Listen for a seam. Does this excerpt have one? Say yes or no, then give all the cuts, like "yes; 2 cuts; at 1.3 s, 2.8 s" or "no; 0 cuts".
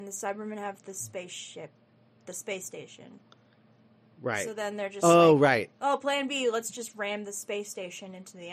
no; 0 cuts